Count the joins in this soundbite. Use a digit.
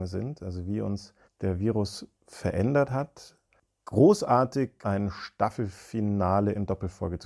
3